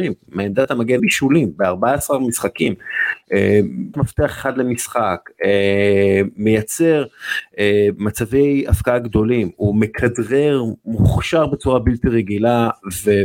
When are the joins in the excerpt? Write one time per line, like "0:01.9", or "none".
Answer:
0:01.0
0:03.9